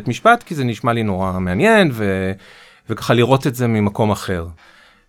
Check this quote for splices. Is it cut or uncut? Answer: uncut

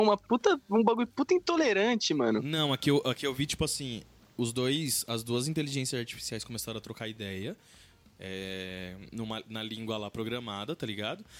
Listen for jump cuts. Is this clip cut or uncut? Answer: uncut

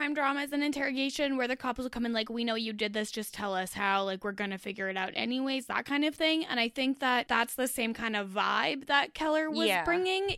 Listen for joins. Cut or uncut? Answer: uncut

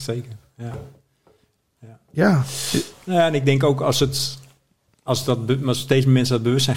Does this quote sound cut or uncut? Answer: uncut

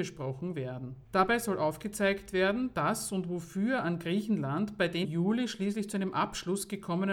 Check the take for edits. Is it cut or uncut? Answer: cut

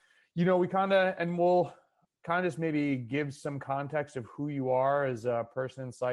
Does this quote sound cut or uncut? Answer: uncut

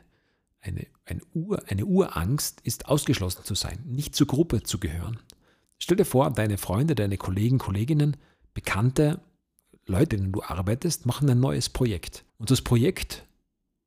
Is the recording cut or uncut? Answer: cut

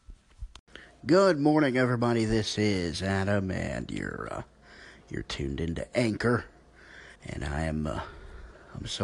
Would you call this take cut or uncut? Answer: cut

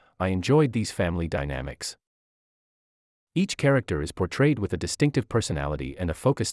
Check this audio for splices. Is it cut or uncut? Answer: uncut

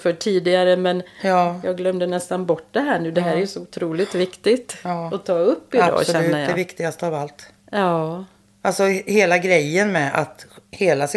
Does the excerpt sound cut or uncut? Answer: uncut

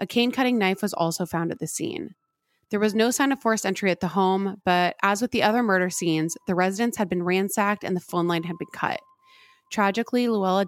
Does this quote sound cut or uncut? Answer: uncut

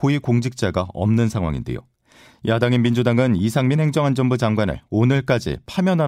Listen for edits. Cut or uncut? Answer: uncut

